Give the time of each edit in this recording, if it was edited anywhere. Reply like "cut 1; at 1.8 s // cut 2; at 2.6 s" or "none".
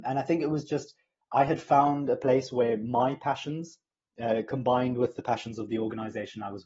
none